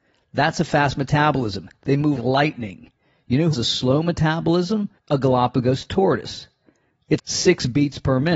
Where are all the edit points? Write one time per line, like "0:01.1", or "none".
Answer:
0:02.2
0:03.5
0:05.0
0:07.2